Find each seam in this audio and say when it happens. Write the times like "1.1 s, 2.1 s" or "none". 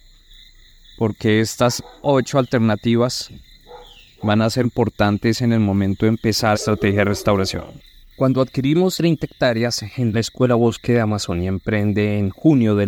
4.6 s, 6.5 s, 8.0 s, 8.9 s, 10.1 s